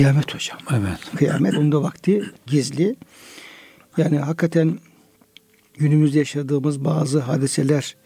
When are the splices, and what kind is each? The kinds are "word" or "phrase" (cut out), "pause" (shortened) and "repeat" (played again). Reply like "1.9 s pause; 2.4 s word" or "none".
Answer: 1.5 s word